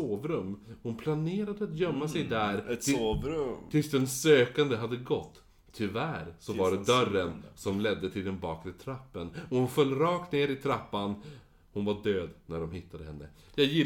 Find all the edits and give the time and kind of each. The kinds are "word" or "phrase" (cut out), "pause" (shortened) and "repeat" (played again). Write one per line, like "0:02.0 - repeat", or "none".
none